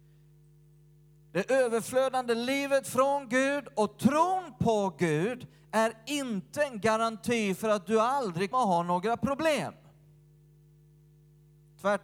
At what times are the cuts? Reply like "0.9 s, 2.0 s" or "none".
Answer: 8.5 s